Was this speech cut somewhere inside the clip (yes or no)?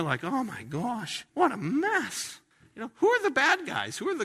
yes